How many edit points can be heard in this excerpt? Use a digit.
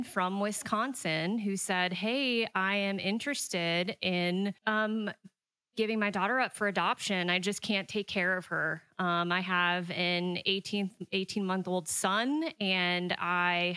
1